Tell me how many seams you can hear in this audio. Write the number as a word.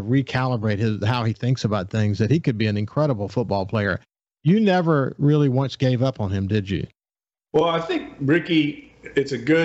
zero